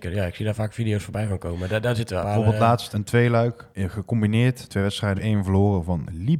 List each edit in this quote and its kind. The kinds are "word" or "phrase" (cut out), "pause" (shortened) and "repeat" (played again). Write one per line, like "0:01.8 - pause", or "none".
0:02.2 - word
0:02.9 - word
0:03.7 - pause
0:04.7 - phrase
0:05.2 - word